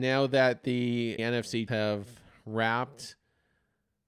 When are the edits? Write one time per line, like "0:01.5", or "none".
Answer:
0:01.2
0:01.7